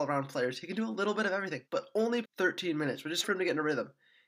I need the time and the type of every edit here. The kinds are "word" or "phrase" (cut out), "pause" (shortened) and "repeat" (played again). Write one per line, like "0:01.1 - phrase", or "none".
0:01.7 - pause
0:02.2 - word
0:03.2 - word